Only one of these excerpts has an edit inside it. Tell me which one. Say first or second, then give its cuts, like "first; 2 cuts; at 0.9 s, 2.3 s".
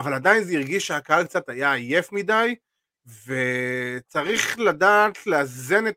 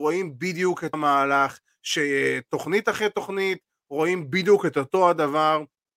second; 1 cut; at 0.9 s